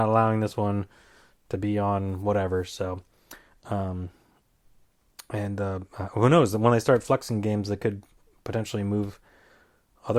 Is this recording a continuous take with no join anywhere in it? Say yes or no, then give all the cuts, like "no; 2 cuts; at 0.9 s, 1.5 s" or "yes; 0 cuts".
yes; 0 cuts